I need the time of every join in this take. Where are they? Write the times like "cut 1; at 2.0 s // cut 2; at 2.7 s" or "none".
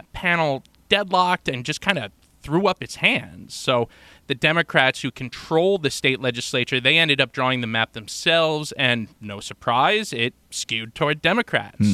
none